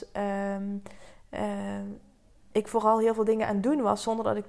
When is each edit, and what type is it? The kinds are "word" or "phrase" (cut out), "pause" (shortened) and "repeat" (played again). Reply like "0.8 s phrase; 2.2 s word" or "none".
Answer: none